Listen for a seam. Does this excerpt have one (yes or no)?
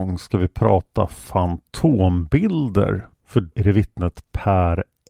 yes